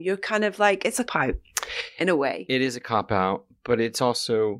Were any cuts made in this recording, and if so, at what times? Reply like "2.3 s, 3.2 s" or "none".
1.1 s